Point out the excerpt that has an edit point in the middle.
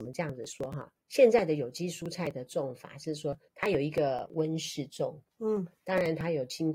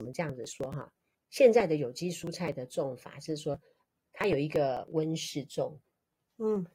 first; 3 cuts; at 1.0 s, 3.5 s, 5.3 s

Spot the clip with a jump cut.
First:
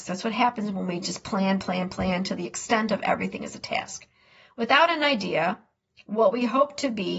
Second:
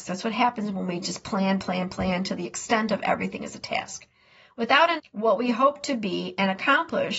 second; 1 cut; at 5.0 s

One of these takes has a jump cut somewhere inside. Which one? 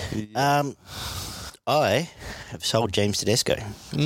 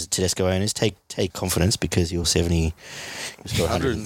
second; 2 cuts; at 1.3 s, 2.2 s

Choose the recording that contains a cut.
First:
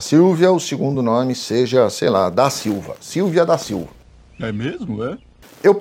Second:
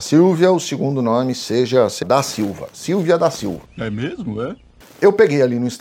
second; 2 cuts; at 2.0 s, 3.7 s

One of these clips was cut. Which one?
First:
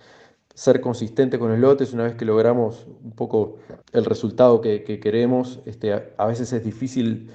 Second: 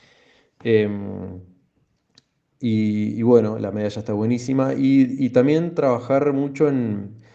first; 1 cut; at 3.8 s

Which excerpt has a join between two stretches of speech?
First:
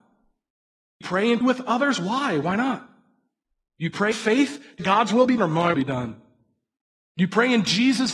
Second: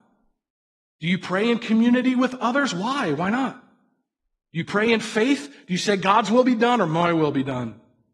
first; 6 cuts; at 1.0 s, 1.4 s, 4.1 s, 4.8 s, 5.4 s, 5.7 s

